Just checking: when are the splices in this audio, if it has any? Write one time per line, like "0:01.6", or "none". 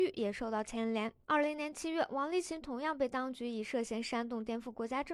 0:01.2